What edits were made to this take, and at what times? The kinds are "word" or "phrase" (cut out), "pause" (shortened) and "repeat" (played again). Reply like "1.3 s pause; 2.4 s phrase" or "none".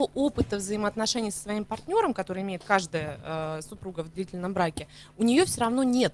none